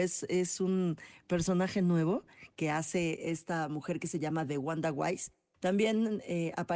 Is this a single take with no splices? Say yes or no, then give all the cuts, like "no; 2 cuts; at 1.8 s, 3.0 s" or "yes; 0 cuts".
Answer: yes; 0 cuts